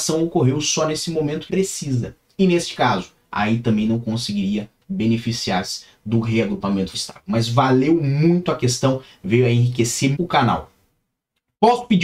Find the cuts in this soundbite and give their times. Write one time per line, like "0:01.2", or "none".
0:01.5
0:06.9
0:10.1